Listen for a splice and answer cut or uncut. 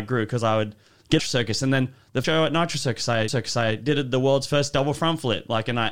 cut